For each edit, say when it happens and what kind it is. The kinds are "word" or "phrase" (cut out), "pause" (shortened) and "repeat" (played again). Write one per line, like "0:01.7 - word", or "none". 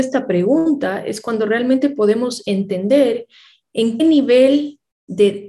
0:04.0 - word